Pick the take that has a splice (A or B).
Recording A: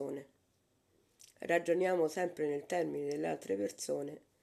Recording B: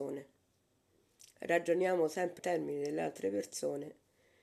B